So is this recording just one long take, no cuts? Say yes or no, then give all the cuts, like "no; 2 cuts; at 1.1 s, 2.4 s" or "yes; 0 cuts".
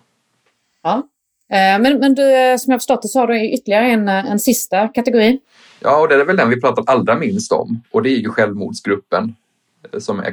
yes; 0 cuts